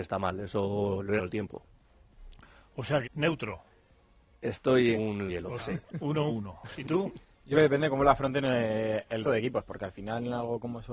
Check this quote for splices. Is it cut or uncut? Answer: cut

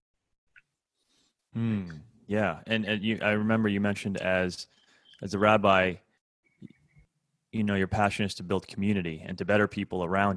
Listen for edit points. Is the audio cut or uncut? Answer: uncut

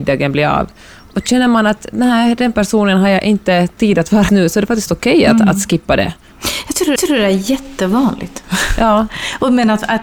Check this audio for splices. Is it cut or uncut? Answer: cut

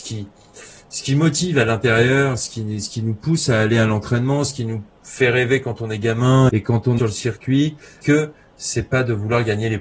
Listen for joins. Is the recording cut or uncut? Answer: cut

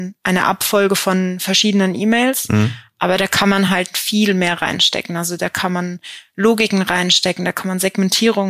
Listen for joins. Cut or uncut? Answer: uncut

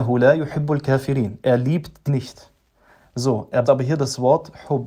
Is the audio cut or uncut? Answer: cut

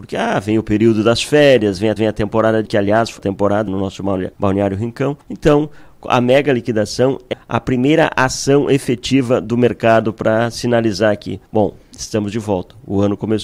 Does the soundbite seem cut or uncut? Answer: cut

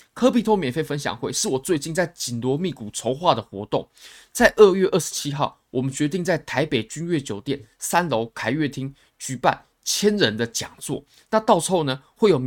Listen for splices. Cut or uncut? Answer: uncut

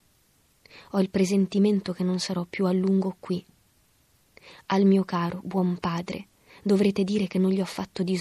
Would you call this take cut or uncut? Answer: uncut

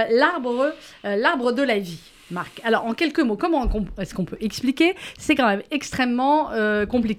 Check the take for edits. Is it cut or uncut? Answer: uncut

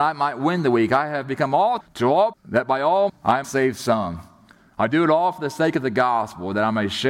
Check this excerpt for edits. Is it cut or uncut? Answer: cut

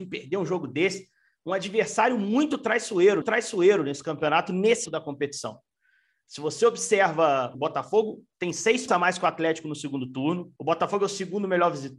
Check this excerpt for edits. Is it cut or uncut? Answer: cut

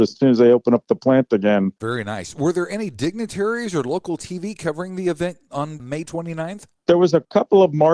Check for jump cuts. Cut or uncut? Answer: cut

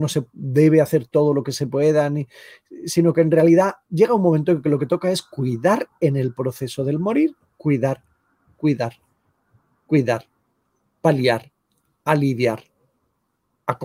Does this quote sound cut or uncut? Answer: uncut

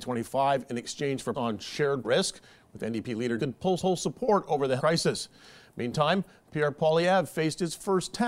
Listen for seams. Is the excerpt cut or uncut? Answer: cut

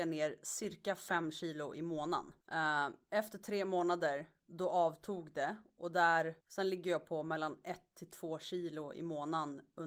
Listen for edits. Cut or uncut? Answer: cut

